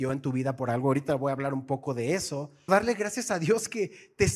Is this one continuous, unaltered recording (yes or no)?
no